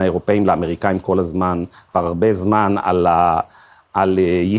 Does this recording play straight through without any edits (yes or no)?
yes